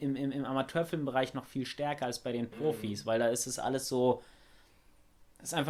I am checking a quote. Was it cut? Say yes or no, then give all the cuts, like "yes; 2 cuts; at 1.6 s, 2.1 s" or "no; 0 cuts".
no; 0 cuts